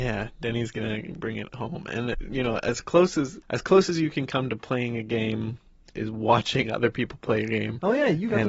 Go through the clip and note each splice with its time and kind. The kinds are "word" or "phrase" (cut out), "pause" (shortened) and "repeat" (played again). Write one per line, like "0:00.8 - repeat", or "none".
0:02.1 - word
0:03.4 - pause
0:05.9 - word